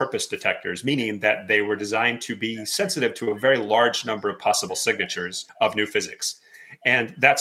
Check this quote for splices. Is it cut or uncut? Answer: cut